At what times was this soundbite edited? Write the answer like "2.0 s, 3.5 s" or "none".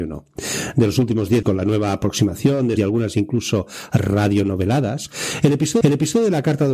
1.4 s, 2.8 s, 5.8 s